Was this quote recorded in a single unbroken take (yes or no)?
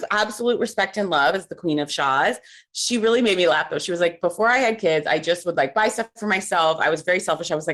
yes